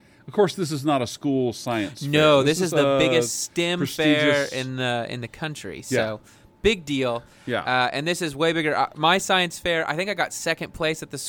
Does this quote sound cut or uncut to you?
uncut